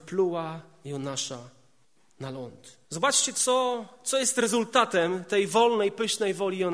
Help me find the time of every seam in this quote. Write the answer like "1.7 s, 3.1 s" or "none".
1.8 s, 2.8 s